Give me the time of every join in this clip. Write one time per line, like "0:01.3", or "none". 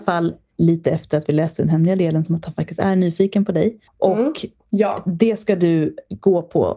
0:03.9